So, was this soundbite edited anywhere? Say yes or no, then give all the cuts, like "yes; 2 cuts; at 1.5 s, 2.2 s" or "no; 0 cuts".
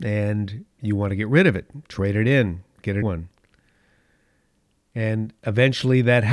yes; 1 cut; at 3.0 s